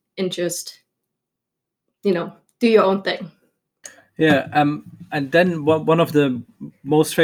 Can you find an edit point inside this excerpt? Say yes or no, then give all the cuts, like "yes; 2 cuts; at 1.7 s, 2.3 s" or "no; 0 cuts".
no; 0 cuts